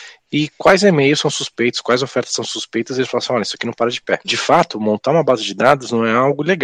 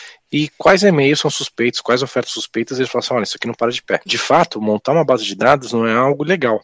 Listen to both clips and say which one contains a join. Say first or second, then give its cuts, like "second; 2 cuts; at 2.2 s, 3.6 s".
second; 1 cut; at 2.3 s